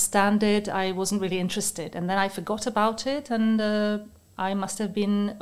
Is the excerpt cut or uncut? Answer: uncut